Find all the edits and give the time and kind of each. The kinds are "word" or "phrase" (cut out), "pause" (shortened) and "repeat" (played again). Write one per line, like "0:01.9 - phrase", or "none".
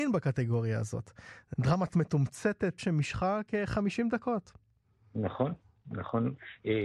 0:01.9 - word
0:02.8 - phrase